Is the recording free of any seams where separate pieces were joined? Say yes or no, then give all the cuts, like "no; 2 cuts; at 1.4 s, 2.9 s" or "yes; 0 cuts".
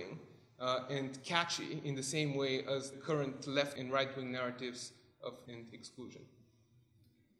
no; 3 cuts; at 2.9 s, 3.8 s, 5.5 s